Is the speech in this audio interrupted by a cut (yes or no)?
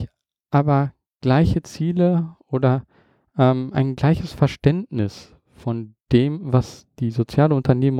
no